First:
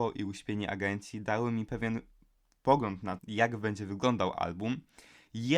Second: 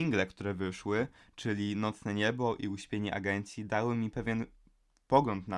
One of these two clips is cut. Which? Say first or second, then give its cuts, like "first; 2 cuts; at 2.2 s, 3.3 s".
first; 1 cut; at 3.2 s